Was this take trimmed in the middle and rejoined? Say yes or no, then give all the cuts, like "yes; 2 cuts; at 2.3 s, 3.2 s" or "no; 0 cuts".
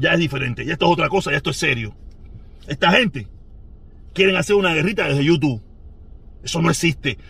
no; 0 cuts